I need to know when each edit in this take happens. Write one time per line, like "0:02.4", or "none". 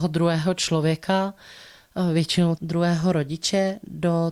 0:02.6